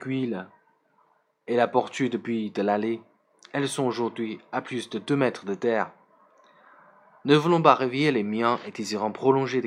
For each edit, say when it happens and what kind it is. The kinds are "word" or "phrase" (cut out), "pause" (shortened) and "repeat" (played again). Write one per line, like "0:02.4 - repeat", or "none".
none